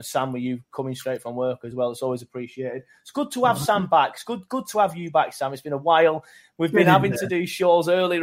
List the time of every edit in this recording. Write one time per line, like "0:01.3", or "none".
none